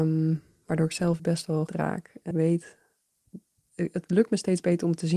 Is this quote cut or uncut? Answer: cut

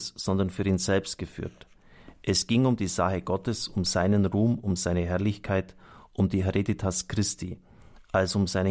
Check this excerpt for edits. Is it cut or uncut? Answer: uncut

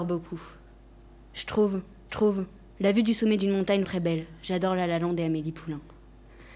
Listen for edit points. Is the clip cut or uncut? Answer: cut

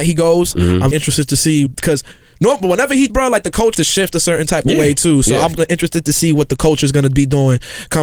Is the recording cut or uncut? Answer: cut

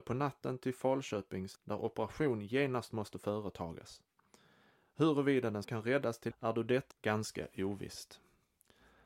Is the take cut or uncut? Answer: cut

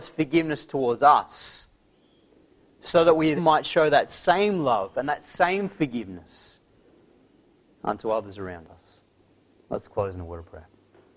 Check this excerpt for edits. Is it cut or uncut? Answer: cut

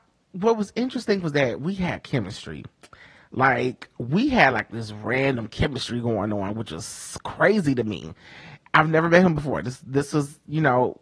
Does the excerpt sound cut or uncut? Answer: uncut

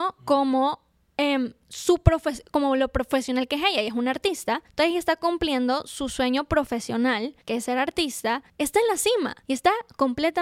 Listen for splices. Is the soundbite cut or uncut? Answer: cut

